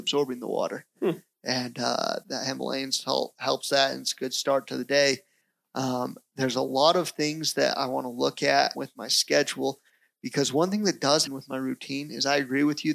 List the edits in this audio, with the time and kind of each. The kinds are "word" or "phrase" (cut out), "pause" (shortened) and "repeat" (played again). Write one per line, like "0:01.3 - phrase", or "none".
0:02.2 - word
0:08.7 - word
0:11.3 - word